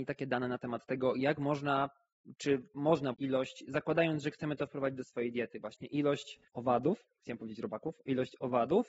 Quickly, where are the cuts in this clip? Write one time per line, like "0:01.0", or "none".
0:03.1
0:06.5